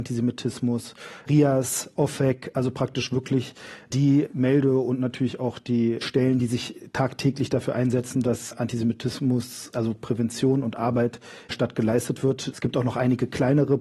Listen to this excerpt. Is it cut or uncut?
cut